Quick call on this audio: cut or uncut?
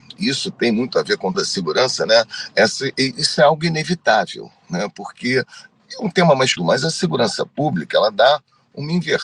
cut